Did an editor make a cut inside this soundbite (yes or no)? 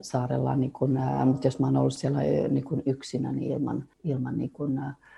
yes